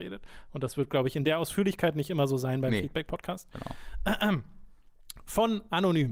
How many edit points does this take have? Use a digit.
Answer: 0